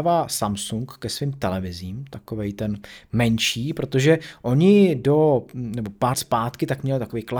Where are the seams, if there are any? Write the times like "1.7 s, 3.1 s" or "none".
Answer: 6.1 s